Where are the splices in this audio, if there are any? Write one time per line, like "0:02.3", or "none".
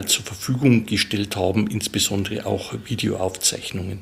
none